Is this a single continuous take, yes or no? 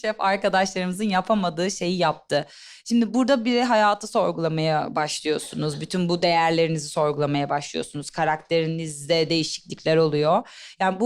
yes